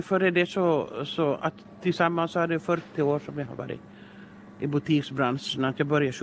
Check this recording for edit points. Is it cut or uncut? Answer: uncut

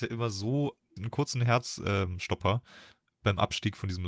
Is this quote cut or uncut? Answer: cut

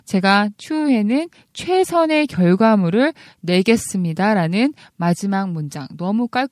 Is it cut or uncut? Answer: uncut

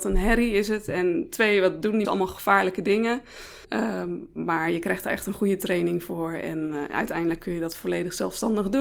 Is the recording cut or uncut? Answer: cut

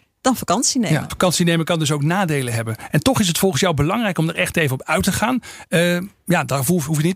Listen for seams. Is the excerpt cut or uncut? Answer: cut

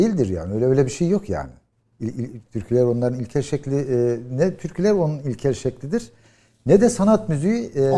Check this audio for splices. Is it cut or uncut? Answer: uncut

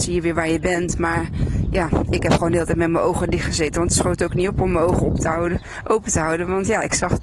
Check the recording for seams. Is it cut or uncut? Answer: uncut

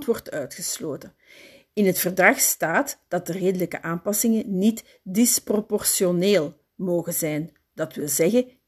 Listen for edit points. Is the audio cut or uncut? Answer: uncut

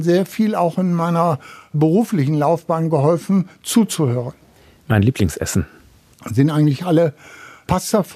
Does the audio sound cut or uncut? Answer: uncut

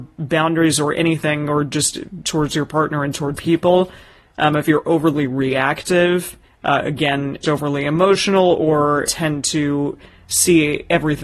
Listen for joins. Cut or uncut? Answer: cut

